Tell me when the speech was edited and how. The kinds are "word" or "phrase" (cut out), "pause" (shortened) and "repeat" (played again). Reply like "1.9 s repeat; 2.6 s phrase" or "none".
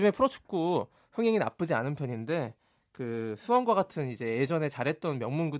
none